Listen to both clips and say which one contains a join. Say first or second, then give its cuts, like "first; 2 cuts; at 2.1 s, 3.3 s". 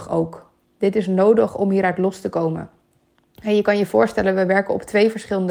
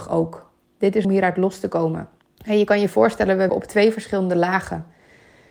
second; 3 cuts; at 1.0 s, 2.2 s, 3.5 s